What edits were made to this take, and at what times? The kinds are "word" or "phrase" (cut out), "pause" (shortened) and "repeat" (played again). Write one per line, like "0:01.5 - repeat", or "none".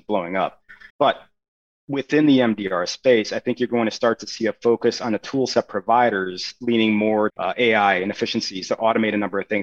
0:00.9 - pause
0:07.3 - word